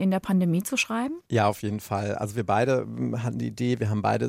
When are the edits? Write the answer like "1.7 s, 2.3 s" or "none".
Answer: 1.2 s